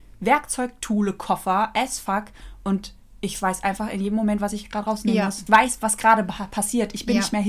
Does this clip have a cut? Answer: yes; 1 cut; at 5.5 s

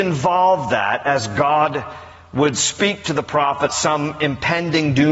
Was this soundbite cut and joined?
yes; 1 cut; at 3.7 s

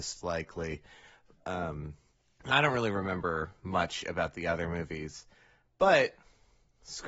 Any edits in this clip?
yes; 1 cut; at 2.5 s

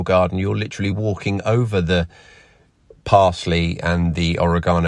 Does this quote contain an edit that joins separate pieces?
no; 0 cuts

